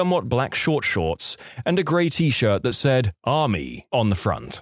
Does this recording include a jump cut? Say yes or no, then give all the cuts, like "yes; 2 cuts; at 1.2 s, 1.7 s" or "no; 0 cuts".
no; 0 cuts